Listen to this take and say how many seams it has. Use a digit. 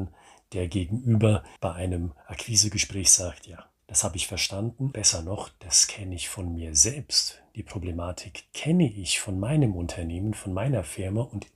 3